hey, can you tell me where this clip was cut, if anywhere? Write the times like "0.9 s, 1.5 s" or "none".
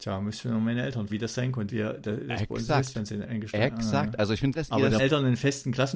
1.1 s, 1.7 s, 3.2 s, 4.5 s, 5.0 s